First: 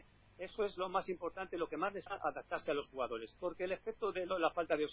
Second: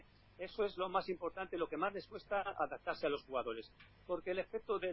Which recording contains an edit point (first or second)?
first